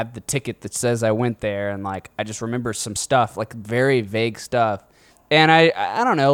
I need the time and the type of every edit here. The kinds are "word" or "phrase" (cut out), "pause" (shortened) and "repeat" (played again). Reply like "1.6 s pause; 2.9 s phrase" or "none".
5.1 s pause